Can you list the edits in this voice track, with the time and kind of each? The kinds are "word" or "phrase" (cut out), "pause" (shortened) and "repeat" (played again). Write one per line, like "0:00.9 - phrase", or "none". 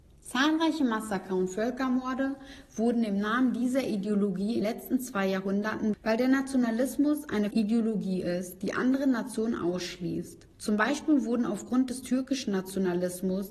0:04.6 - word
0:05.9 - word
0:07.5 - word
0:10.5 - pause